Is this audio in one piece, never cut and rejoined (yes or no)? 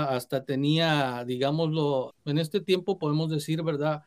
no